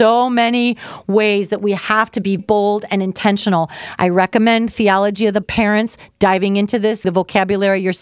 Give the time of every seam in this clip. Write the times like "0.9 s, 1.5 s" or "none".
2.4 s, 5.4 s, 7.0 s